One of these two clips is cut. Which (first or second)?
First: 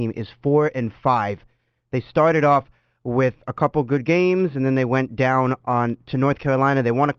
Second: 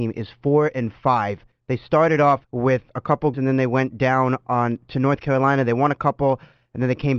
second